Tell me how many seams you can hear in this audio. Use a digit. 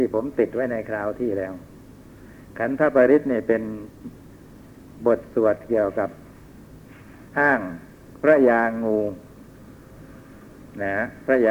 1